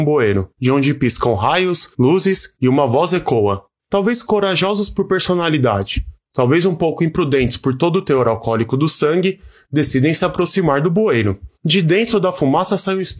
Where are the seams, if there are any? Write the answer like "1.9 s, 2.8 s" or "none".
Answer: 1.9 s, 11.5 s